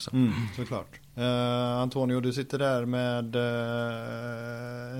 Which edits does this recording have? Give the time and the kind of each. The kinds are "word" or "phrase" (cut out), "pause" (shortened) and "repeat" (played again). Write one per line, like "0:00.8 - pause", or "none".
0:01.1 - pause